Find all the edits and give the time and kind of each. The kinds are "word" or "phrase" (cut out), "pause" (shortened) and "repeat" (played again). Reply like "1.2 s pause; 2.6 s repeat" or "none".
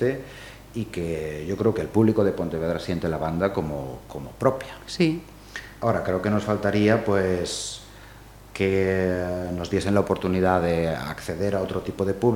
none